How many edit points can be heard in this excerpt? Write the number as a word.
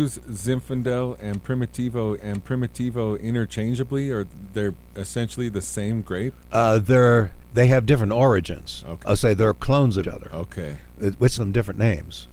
six